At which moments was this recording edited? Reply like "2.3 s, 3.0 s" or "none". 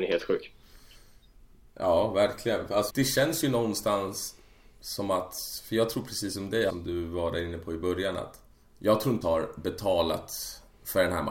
2.9 s, 6.7 s, 8.6 s, 9.2 s